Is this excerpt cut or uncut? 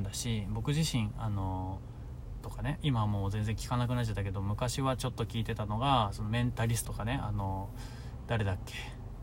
cut